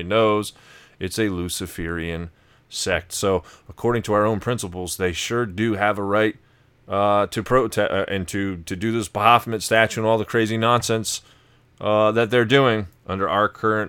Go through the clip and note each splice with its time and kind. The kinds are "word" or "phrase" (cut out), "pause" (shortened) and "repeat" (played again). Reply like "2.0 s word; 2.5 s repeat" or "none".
none